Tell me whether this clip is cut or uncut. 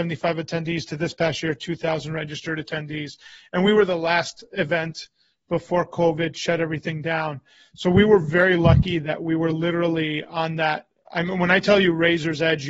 uncut